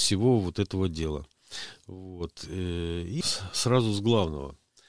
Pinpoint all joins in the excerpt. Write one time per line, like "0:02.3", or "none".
0:03.2